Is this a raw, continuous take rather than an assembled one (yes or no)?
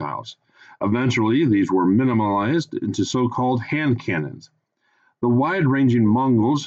yes